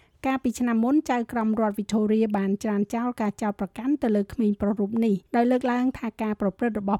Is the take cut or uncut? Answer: cut